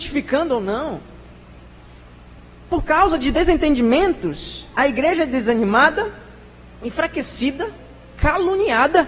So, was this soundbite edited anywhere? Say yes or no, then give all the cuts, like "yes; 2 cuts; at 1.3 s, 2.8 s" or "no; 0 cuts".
no; 0 cuts